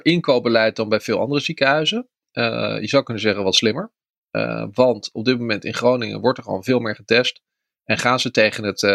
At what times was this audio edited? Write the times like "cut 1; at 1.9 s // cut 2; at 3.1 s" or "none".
none